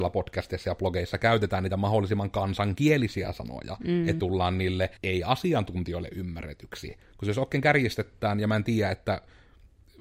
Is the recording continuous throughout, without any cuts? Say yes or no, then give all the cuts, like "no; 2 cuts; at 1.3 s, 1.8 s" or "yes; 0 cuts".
no; 2 cuts; at 4.2 s, 5.0 s